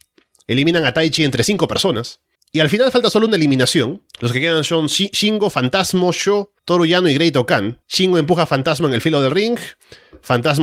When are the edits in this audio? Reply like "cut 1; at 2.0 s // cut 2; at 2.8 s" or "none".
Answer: cut 1; at 2.3 s // cut 2; at 4.1 s // cut 3; at 6.6 s // cut 4; at 7.8 s